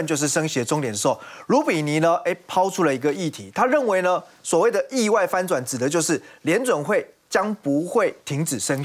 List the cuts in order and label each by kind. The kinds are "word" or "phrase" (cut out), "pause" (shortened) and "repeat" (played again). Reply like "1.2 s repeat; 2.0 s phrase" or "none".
none